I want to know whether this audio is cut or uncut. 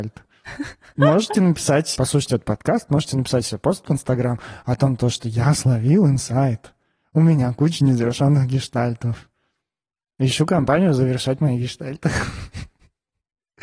cut